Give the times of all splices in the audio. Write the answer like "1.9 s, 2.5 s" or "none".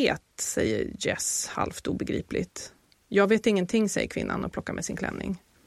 none

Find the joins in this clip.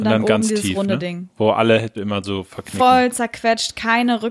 1.9 s

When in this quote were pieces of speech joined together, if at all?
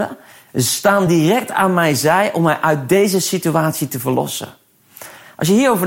none

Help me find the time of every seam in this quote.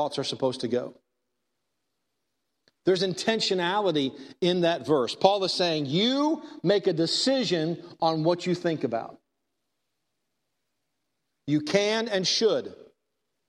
none

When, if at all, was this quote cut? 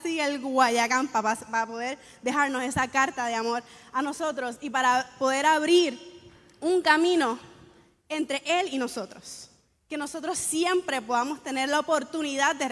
none

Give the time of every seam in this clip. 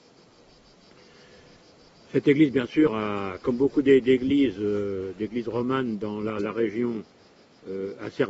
none

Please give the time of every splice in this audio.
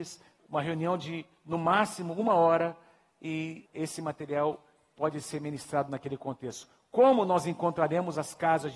3.7 s

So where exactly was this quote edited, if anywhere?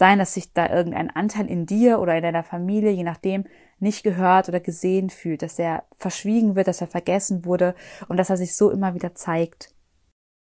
none

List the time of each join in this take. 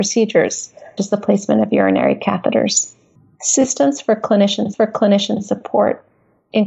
1.0 s, 4.7 s

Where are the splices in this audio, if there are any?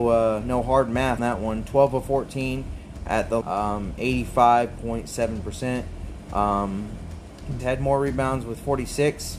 1.2 s, 3.4 s, 7.6 s

